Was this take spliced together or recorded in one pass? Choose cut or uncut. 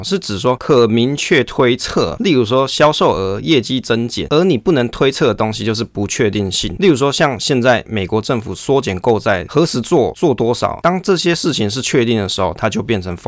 uncut